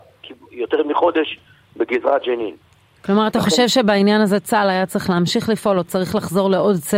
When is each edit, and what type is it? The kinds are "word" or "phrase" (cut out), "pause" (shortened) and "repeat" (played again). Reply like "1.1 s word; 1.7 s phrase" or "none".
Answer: none